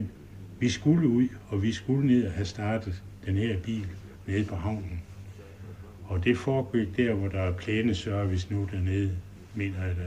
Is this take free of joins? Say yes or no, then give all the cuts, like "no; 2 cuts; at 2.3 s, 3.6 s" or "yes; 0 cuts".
yes; 0 cuts